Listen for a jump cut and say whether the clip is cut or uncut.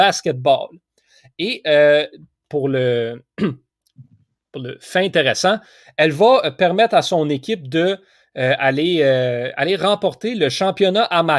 uncut